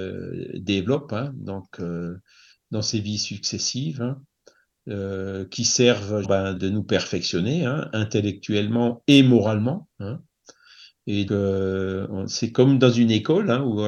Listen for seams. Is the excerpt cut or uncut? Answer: cut